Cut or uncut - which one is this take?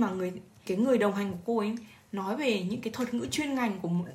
uncut